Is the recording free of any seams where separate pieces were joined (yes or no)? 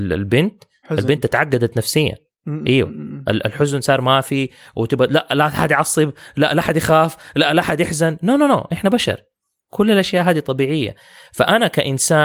yes